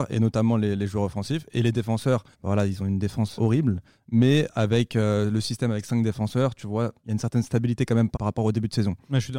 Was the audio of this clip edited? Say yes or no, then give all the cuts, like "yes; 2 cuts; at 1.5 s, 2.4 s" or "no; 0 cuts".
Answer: yes; 4 cuts; at 2.3 s, 3.4 s, 7.0 s, 8.1 s